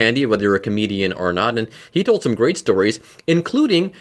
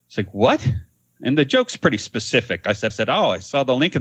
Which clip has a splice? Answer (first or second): second